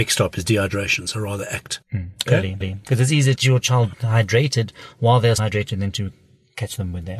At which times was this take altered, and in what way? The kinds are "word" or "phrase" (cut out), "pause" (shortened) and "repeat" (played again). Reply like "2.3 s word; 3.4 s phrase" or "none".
1.8 s pause; 2.6 s repeat; 3.4 s phrase; 3.9 s word; 5.4 s word